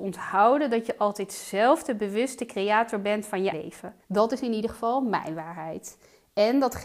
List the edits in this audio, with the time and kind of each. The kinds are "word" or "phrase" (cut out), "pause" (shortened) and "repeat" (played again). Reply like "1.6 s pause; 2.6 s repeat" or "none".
3.5 s word; 4.0 s pause